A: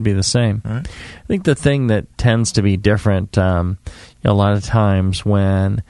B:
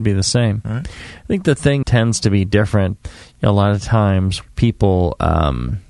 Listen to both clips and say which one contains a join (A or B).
B